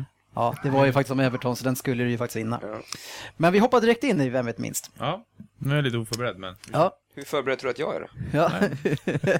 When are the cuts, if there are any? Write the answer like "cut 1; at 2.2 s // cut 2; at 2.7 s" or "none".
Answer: cut 1; at 7.0 s